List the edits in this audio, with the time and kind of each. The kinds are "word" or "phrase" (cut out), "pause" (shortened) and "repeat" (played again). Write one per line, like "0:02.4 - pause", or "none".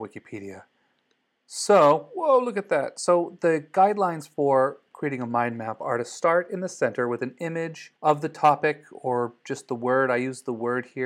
0:08.0 - pause

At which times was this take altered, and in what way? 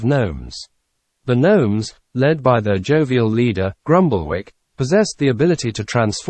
0:01.0 - pause
0:03.8 - pause

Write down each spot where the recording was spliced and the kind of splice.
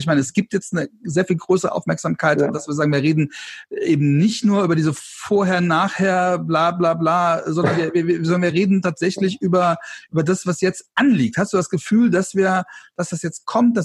none

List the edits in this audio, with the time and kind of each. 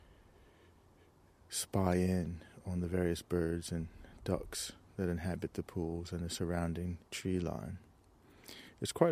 0:07.1 - pause

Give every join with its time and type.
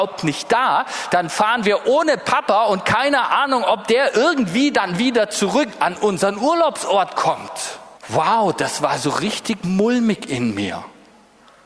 0:08.0 - pause

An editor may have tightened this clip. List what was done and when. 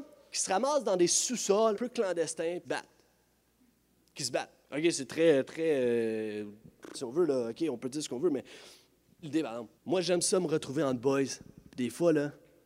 0:01.7 - word
0:02.6 - phrase
0:04.6 - pause
0:06.9 - word
0:09.2 - word
0:09.8 - pause

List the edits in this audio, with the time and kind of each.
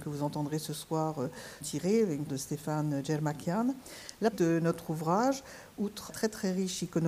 0:01.6 - word
0:02.3 - word
0:04.3 - word
0:06.1 - word

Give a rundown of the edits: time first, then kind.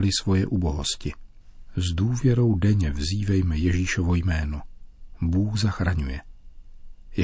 none

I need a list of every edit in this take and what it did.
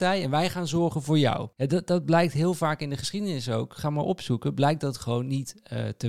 0:01.5 - pause

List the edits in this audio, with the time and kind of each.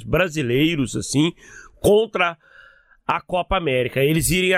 none

